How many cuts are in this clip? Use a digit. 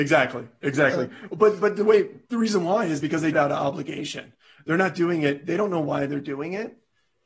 2